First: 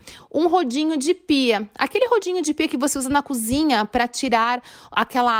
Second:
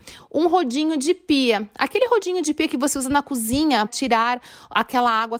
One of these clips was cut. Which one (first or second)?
second